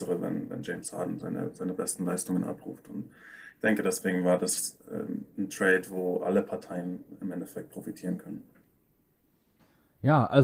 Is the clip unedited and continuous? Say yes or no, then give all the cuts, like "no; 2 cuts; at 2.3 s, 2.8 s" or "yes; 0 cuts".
yes; 0 cuts